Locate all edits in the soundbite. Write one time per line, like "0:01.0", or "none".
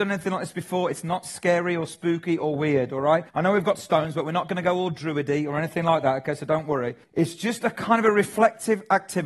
0:03.3
0:07.0